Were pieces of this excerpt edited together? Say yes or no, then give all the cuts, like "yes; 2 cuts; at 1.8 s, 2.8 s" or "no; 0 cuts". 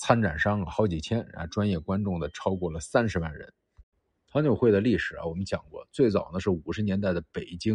no; 0 cuts